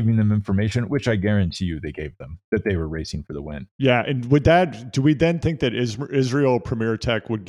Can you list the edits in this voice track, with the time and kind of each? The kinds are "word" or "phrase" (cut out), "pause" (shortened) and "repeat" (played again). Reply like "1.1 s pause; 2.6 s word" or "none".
3.7 s pause